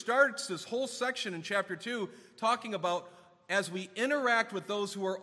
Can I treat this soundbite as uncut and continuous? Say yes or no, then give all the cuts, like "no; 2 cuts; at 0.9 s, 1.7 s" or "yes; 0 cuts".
yes; 0 cuts